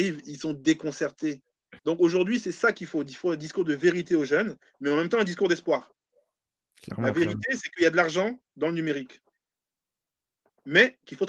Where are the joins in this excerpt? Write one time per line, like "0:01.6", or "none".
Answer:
0:01.8

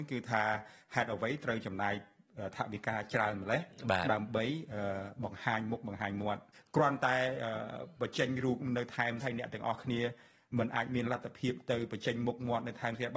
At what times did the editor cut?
0:09.2

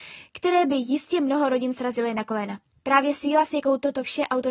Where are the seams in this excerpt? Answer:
none

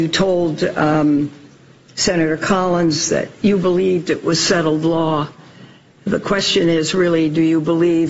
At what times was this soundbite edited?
none

